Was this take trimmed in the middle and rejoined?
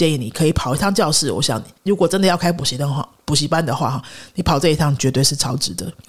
no; 0 cuts

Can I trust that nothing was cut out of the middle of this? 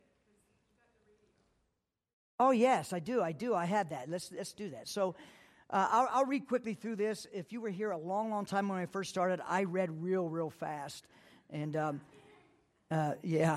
yes; 0 cuts

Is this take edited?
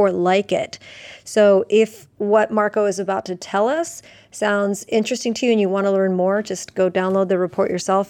no; 0 cuts

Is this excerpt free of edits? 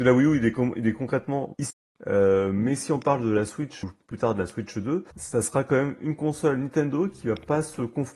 no; 2 cuts; at 1.5 s, 5.1 s

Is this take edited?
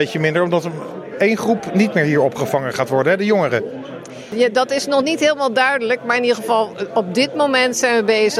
no; 0 cuts

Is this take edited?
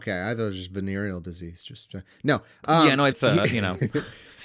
yes; 1 cut; at 3.1 s

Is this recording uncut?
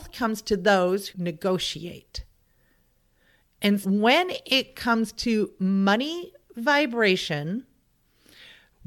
no; 2 cuts; at 1.1 s, 3.8 s

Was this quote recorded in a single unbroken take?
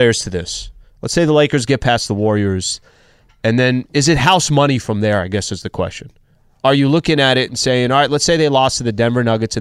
yes; 0 cuts

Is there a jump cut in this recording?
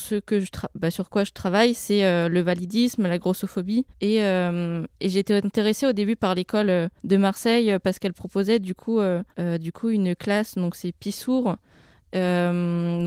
yes; 3 cuts; at 3.9 s, 7.0 s, 9.3 s

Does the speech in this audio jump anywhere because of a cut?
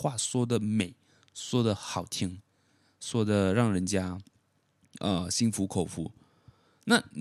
no; 0 cuts

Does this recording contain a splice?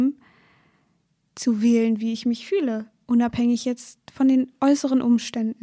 no; 0 cuts

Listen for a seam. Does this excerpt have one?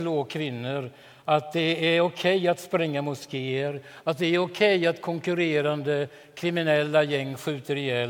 no; 0 cuts

